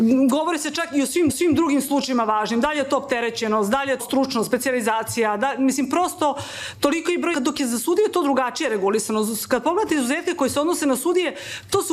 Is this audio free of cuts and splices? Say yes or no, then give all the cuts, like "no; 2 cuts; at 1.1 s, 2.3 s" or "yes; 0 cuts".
no; 3 cuts; at 1.3 s, 4.0 s, 7.3 s